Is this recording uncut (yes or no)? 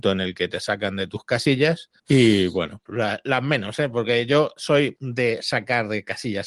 no